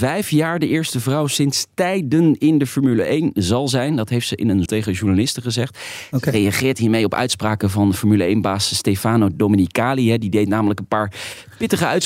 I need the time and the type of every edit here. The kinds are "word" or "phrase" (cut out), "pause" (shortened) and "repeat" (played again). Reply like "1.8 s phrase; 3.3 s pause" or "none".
4.7 s word